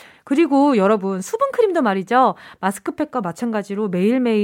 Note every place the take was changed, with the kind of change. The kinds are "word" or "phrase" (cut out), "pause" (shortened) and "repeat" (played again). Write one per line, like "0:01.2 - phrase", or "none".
none